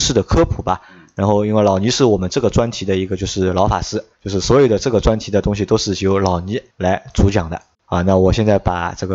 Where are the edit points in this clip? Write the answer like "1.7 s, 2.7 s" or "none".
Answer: 4.1 s, 6.7 s, 7.7 s